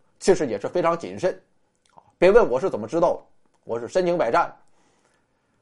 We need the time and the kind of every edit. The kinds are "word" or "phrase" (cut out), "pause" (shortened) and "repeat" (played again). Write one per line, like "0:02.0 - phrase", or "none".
none